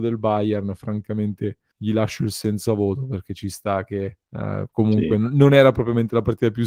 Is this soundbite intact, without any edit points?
no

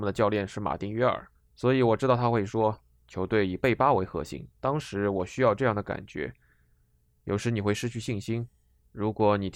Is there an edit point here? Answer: yes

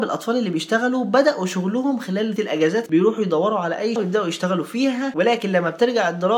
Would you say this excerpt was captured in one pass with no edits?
no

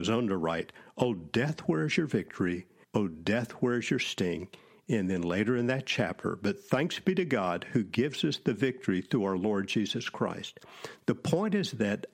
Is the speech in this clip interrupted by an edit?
yes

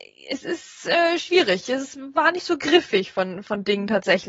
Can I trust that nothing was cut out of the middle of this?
yes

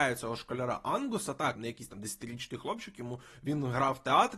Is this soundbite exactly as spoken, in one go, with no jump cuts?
no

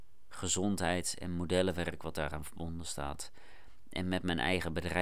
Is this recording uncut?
yes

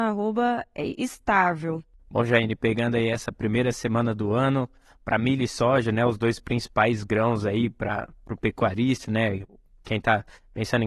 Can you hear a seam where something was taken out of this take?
no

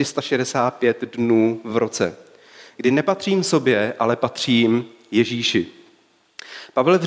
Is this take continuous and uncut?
yes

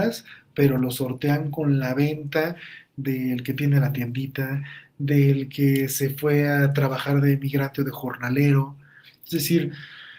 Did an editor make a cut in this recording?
no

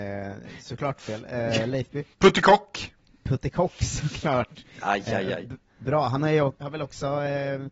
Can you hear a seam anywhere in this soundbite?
yes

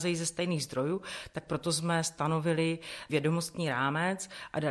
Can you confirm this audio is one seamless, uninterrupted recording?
no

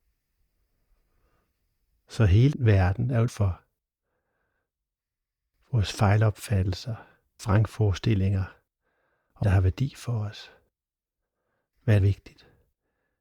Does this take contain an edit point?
yes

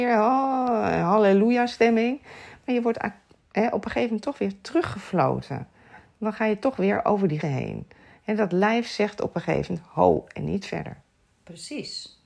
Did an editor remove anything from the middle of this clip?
yes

